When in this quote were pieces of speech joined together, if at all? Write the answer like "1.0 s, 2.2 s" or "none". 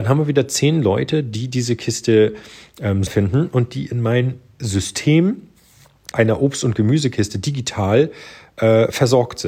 3.1 s, 6.1 s